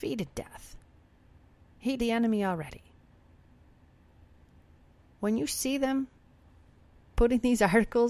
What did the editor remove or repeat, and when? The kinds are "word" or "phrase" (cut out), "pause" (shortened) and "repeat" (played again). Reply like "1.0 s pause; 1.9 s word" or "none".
2.0 s word